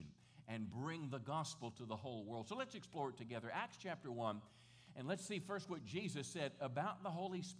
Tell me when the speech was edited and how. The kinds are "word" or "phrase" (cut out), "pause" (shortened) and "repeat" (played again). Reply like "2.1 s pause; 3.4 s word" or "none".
none